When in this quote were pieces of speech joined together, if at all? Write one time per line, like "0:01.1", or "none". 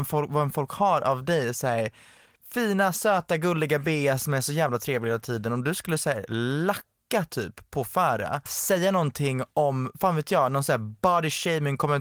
0:08.5